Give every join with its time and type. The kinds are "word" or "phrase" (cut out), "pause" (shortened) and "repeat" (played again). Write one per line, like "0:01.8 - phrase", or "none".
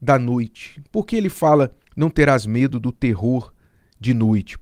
0:01.8 - pause